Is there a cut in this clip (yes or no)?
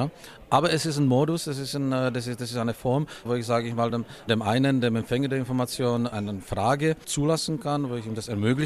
no